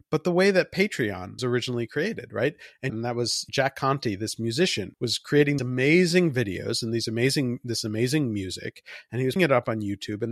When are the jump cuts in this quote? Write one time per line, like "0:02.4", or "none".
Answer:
0:01.4
0:02.9
0:03.5
0:04.9
0:05.6
0:09.4